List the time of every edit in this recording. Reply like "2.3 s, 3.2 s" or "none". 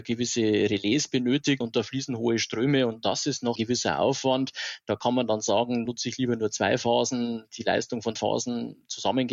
1.6 s, 3.6 s, 5.9 s, 8.2 s